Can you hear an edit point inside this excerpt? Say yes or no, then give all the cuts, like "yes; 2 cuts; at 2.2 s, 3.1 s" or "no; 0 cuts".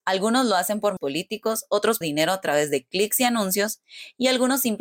yes; 2 cuts; at 1.0 s, 2.0 s